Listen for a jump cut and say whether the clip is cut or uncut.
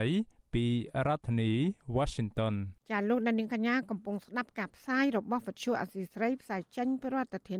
cut